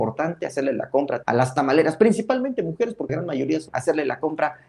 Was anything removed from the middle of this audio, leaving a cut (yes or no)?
yes